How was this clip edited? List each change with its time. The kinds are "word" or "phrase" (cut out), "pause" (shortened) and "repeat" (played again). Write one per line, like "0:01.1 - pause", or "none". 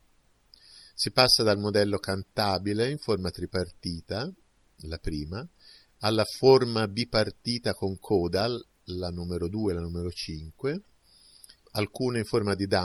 none